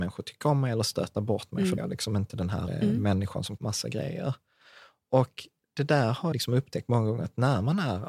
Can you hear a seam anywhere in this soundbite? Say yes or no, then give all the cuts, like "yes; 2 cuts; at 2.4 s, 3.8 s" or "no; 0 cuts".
yes; 4 cuts; at 1.8 s, 2.7 s, 3.6 s, 6.3 s